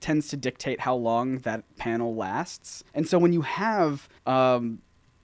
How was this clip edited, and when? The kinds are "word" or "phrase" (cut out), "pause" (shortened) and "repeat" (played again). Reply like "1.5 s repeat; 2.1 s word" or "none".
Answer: 2.9 s pause; 4.2 s pause